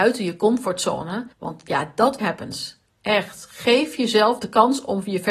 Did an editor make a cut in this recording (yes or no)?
yes